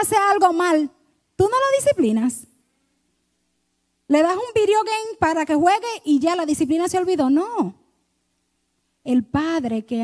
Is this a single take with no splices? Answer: yes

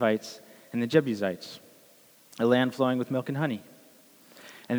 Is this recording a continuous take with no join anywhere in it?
yes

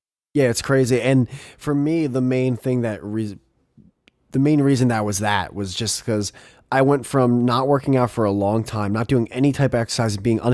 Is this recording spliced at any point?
no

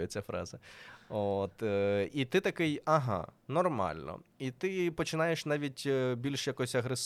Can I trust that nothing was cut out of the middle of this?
yes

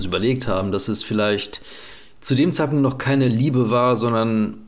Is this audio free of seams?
yes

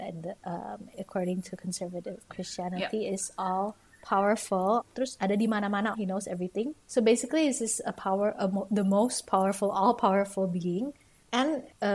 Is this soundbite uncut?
no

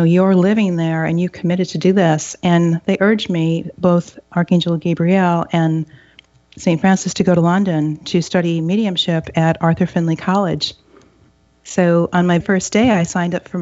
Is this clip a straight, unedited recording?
no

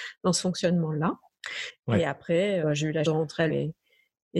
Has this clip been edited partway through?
yes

